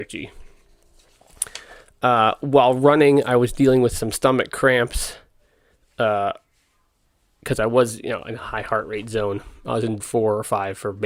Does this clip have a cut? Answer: yes; 1 cut; at 10.0 s

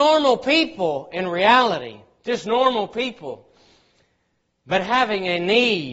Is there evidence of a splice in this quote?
no; 0 cuts

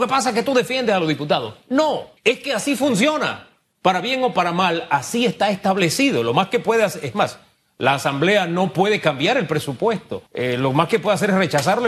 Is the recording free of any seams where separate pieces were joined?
no; 2 cuts; at 2.2 s, 10.3 s

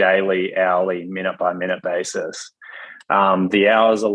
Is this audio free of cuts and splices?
yes; 0 cuts

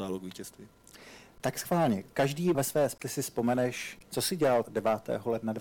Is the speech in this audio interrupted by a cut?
yes; 3 cuts; at 2.5 s, 4.1 s, 4.6 s

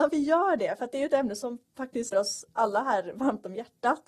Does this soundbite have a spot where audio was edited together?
yes; 1 cut; at 2.1 s

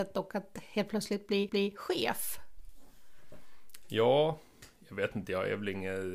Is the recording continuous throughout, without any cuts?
no; 1 cut; at 1.5 s

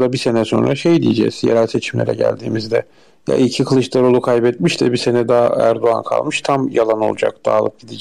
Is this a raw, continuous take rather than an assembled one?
yes; 0 cuts

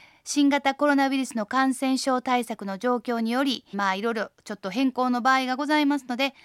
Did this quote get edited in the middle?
yes; 1 cut; at 3.7 s

